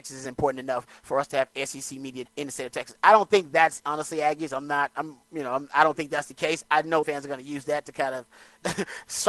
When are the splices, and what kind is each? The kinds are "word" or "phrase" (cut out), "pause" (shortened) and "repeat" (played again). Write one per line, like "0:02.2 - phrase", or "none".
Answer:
0:02.3 - word
0:03.8 - word
0:07.0 - word